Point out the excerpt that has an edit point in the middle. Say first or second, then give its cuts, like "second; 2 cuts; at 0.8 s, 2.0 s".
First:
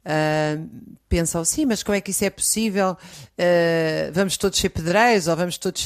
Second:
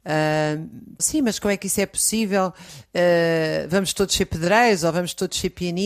second; 1 cut; at 1.0 s